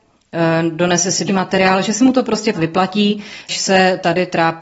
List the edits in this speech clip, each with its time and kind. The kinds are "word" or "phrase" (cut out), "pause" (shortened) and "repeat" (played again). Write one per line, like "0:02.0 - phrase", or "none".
0:01.3 - word
0:02.5 - word
0:03.5 - word

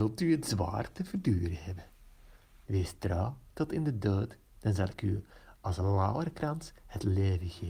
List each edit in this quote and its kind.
none

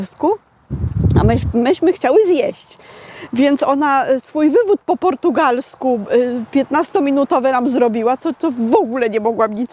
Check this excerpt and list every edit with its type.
none

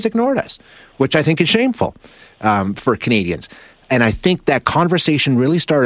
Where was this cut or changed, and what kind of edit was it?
none

